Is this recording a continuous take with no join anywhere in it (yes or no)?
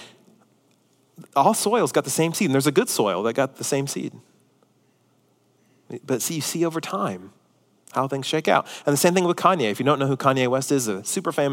yes